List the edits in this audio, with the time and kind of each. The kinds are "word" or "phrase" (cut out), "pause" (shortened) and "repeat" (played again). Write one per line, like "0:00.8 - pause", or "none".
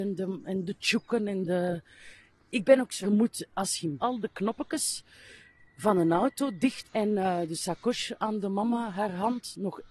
0:03.0 - phrase
0:04.0 - phrase
0:06.8 - word